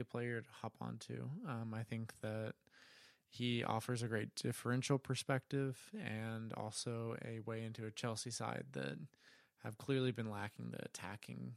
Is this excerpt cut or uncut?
uncut